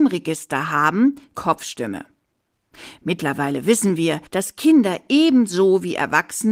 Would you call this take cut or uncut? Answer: cut